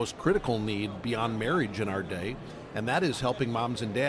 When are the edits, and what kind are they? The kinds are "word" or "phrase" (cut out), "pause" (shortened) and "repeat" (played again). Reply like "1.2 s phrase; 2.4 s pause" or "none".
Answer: none